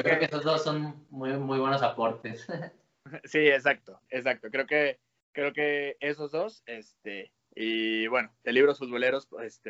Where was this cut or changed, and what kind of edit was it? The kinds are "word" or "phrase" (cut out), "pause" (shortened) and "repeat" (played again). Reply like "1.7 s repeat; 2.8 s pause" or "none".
5.2 s pause